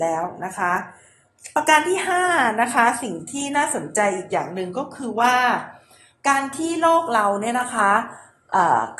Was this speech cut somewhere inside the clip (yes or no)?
no